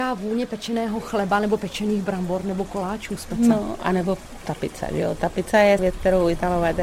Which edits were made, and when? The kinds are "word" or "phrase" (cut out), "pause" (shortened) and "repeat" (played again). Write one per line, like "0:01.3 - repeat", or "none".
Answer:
0:04.4 - word
0:05.8 - phrase

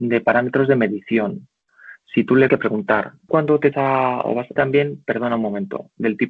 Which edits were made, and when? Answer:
0:02.5 - phrase
0:03.3 - word
0:03.7 - word
0:04.6 - word

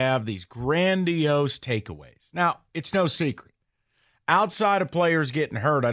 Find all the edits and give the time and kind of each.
none

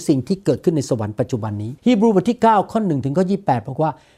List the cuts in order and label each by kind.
0:01.8 - pause

